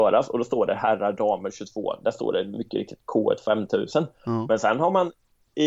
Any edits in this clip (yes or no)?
no